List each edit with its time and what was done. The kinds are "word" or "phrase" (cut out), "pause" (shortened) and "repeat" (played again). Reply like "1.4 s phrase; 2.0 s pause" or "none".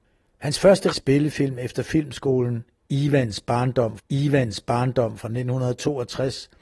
0.9 s word; 4.0 s repeat